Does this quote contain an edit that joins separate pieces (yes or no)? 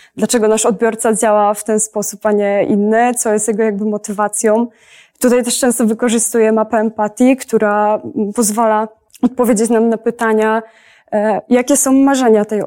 no